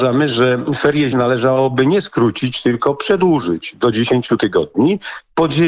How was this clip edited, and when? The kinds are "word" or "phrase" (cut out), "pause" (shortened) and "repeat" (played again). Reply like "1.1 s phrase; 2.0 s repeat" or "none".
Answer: 1.1 s word